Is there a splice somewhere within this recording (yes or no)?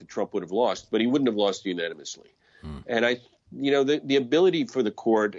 no